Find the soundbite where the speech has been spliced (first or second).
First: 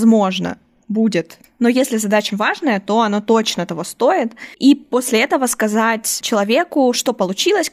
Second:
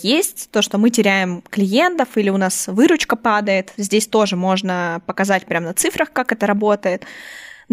first